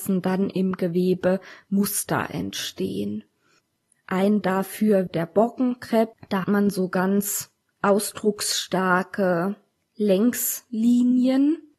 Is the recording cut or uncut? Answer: cut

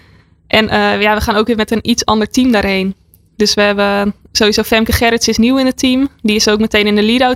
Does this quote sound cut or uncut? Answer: uncut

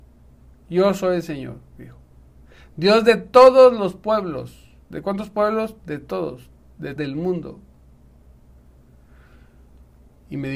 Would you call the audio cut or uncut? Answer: cut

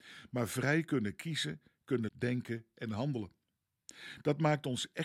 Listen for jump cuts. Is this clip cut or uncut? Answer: cut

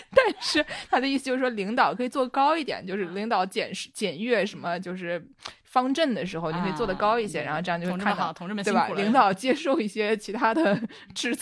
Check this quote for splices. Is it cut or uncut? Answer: uncut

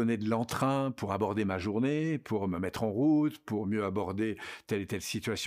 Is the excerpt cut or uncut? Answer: uncut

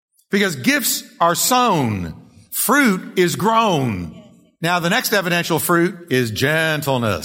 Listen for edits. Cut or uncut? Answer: uncut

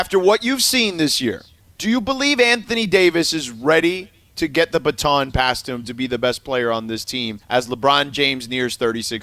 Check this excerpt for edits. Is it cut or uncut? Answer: cut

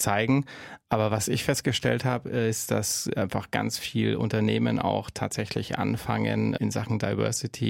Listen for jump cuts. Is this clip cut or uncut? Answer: uncut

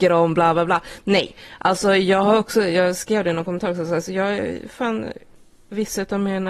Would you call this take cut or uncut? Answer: uncut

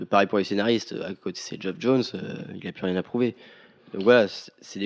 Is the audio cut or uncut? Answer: uncut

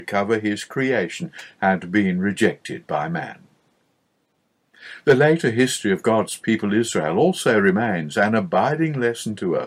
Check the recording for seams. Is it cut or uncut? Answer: uncut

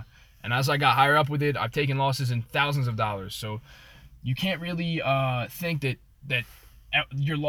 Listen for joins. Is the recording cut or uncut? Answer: uncut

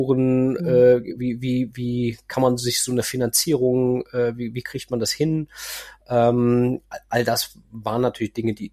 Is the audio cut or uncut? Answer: uncut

